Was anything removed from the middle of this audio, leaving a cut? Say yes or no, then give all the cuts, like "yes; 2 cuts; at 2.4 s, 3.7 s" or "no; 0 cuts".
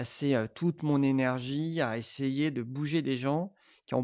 no; 0 cuts